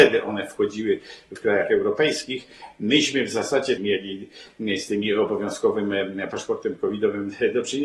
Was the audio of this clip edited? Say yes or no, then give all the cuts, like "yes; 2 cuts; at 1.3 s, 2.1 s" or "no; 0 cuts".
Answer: yes; 2 cuts; at 1.4 s, 3.8 s